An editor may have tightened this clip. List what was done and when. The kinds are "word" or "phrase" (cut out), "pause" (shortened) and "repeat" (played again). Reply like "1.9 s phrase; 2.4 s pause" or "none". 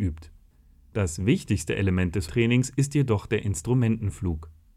2.3 s word